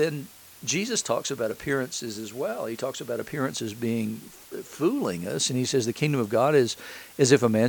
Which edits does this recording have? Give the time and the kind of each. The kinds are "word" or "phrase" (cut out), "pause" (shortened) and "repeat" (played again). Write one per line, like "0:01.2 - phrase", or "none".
none